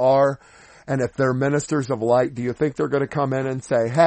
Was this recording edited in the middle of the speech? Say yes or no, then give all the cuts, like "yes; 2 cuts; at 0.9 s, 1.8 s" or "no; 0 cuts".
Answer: no; 0 cuts